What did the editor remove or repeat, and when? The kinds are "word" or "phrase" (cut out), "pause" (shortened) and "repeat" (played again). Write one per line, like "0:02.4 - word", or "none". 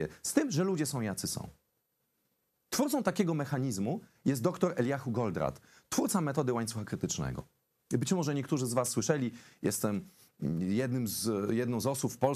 none